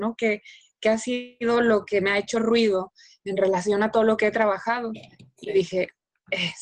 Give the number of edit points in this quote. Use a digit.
0